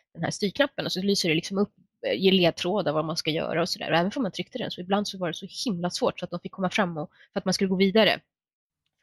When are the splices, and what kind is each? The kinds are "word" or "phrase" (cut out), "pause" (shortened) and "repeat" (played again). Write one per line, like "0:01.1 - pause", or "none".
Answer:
none

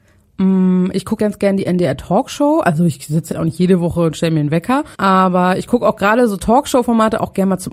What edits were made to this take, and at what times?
0:01.2 - word
0:03.3 - word
0:04.9 - pause

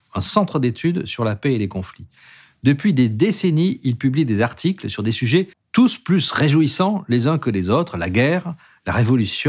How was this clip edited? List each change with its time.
0:05.5 - pause

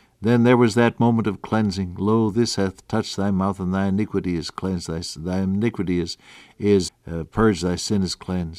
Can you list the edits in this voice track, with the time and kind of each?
0:06.9 - word

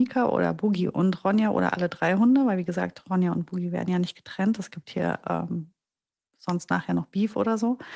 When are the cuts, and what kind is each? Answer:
none

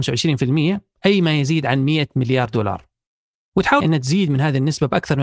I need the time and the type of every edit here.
0:03.8 - phrase

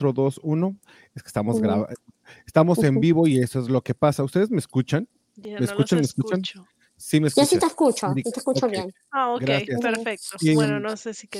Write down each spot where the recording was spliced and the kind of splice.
none

